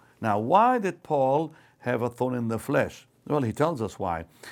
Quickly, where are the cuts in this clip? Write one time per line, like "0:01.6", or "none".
none